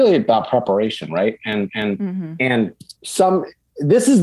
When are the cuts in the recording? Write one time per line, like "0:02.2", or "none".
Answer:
0:01.7
0:03.0